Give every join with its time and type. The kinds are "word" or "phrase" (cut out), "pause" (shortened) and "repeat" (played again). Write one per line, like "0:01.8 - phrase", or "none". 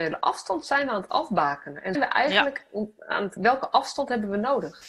0:01.9 - word
0:03.4 - word